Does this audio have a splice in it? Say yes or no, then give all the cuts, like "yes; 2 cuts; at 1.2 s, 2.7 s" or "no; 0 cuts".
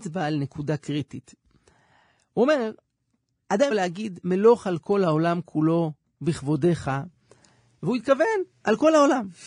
yes; 1 cut; at 3.7 s